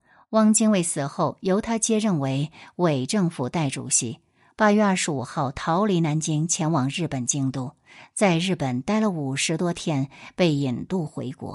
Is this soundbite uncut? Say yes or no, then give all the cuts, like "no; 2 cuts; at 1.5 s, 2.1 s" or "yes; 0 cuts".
yes; 0 cuts